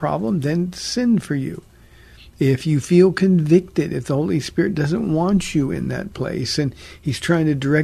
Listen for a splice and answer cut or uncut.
uncut